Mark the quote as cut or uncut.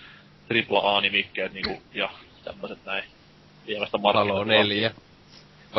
cut